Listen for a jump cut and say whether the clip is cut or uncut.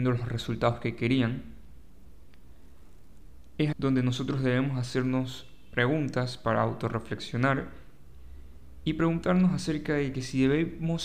cut